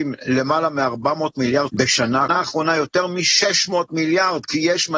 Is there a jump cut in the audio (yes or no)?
yes